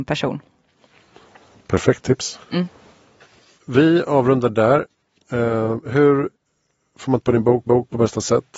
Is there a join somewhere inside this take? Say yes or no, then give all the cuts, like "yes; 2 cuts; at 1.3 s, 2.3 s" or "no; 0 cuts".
yes; 2 cuts; at 7.2 s, 7.7 s